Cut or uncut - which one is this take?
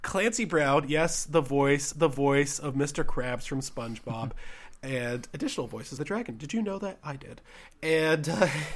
cut